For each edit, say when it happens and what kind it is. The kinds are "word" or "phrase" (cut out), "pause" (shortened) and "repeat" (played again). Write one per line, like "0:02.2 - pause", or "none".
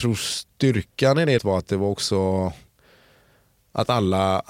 0:01.4 - word